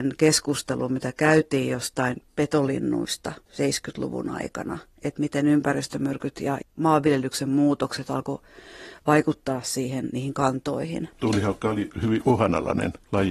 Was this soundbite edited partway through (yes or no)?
yes